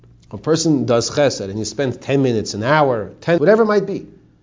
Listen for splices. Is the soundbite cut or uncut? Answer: cut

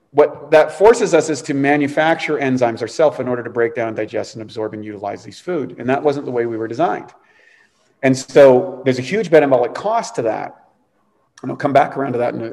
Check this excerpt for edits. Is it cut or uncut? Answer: uncut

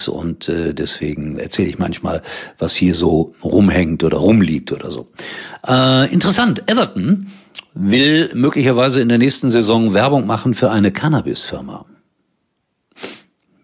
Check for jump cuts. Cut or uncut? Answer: cut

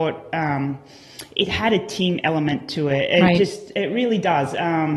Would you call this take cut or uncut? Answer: uncut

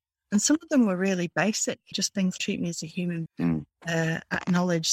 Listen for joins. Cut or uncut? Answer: cut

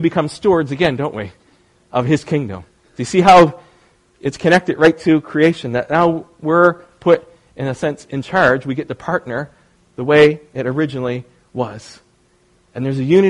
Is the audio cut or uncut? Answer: uncut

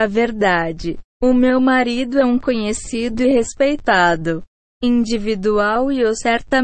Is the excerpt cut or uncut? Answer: uncut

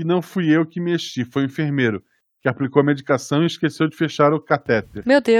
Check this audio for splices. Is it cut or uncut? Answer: uncut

